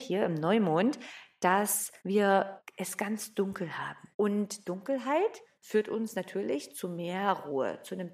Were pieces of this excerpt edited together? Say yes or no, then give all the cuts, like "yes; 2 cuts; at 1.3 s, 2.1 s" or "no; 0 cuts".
yes; 2 cuts; at 2.0 s, 4.1 s